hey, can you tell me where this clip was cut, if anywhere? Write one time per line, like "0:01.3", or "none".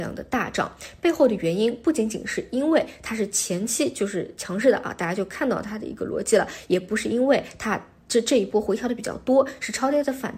none

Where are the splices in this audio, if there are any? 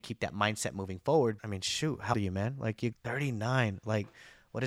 0:01.4
0:02.1
0:02.9

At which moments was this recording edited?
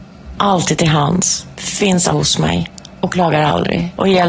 0:02.1

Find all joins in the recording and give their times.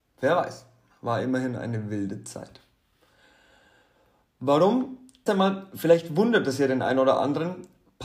0:05.3

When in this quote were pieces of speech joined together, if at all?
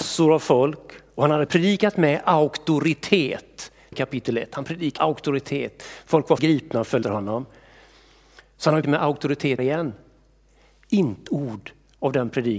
0:01.5
0:03.9
0:05.0
0:06.4
0:07.0
0:08.8
0:09.6
0:11.3

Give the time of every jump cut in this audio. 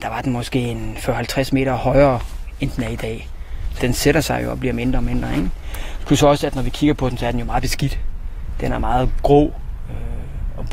0:03.8

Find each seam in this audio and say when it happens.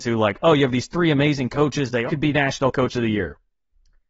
0:02.1

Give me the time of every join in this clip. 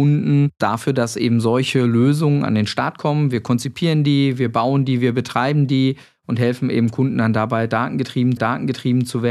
0:08.4

